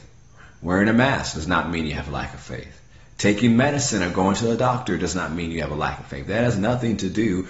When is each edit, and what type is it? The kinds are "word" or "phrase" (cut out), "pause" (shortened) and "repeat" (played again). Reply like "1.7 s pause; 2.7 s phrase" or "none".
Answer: none